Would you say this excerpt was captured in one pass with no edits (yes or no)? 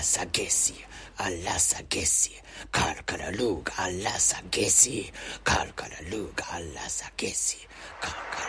no